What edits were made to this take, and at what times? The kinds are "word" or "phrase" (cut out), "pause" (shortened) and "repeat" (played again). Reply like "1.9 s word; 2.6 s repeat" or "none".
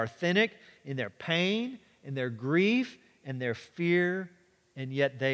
none